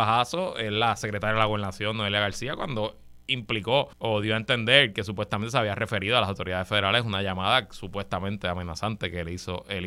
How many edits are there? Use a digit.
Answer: 1